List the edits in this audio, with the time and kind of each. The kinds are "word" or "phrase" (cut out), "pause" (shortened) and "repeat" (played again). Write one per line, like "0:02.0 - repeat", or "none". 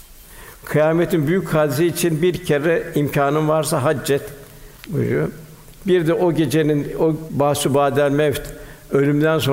0:04.8 - pause